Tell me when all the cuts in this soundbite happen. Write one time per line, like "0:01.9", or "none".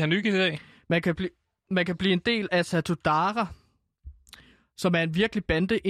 none